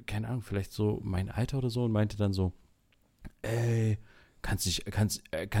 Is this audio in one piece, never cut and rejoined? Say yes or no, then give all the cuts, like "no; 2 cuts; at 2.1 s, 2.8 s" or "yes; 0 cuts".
yes; 0 cuts